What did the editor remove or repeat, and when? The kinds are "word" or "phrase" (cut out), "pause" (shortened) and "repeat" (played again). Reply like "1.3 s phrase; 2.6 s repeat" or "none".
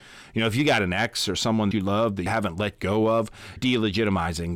1.7 s word; 2.3 s word; 3.6 s word